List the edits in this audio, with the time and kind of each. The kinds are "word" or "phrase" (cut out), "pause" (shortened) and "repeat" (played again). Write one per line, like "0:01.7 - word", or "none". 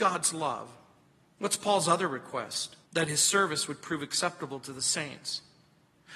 0:01.0 - pause
0:02.8 - pause